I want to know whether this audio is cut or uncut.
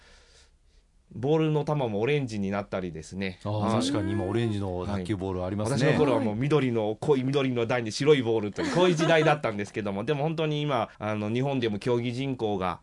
cut